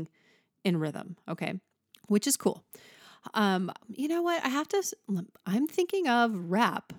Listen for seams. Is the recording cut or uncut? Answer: cut